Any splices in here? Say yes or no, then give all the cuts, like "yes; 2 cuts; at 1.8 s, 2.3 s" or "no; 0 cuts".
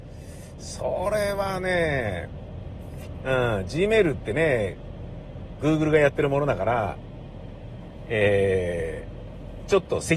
no; 0 cuts